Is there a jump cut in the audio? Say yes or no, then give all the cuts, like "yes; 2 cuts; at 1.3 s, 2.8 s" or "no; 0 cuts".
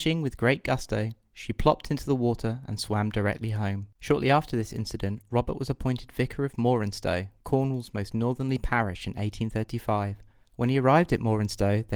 no; 0 cuts